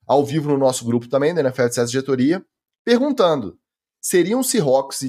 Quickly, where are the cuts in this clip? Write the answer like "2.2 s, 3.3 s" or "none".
none